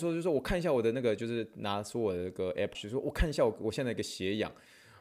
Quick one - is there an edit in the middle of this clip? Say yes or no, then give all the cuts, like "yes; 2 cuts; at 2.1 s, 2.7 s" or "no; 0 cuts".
yes; 1 cut; at 2.7 s